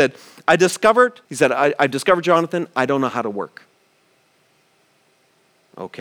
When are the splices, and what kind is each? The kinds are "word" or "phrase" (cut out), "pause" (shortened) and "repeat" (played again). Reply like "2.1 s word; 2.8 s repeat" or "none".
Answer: 1.2 s pause